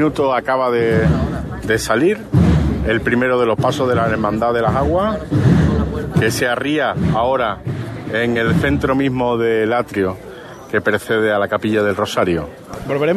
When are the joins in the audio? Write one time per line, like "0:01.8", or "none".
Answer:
none